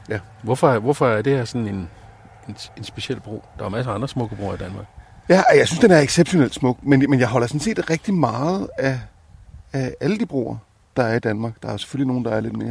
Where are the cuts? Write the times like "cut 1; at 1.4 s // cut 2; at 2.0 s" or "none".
none